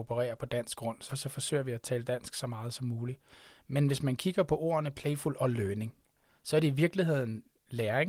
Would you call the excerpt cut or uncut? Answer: cut